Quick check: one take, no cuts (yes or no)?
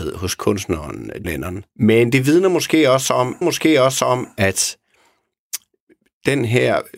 no